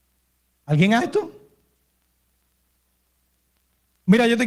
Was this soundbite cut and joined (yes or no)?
yes